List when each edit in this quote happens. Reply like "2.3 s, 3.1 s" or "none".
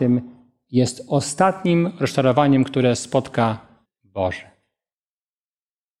3.8 s